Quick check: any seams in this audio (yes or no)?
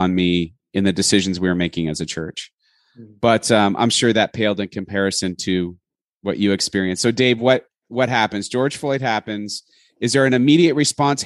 no